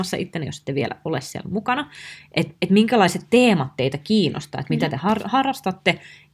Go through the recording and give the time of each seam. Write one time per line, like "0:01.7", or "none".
none